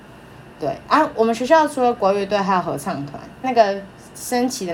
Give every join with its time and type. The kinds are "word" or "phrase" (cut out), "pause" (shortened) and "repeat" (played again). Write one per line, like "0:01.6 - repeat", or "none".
0:03.4 - phrase

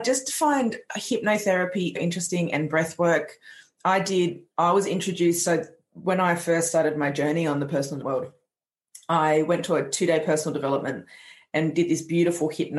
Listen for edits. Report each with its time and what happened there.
0:02.0 - word
0:08.0 - word

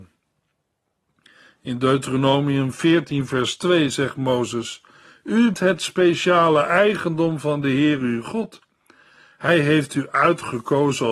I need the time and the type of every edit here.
0:05.5 - word

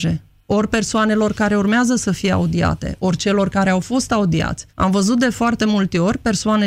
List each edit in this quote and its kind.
0:04.7 - pause

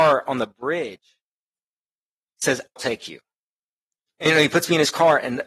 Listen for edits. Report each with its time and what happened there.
0:02.8 - word

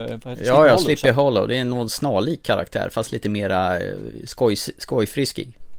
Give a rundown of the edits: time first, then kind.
none

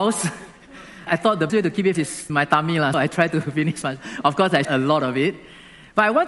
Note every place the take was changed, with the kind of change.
0:01.1 - word
0:01.5 - word
0:01.9 - word
0:02.3 - word
0:02.9 - word
0:03.8 - word
0:04.6 - word

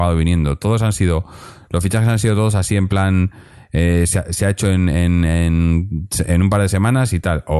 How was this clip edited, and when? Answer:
none

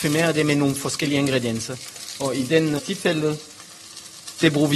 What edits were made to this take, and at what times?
0:02.8 - word

